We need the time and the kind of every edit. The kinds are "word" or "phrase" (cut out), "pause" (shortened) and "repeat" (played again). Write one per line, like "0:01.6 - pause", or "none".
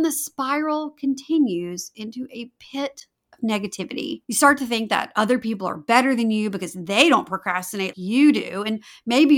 0:04.2 - pause
0:07.9 - word